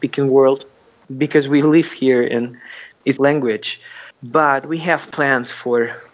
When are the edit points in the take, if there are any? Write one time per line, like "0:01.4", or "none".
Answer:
0:03.2
0:04.1